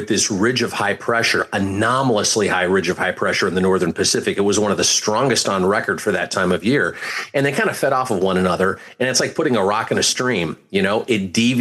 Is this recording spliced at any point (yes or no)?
no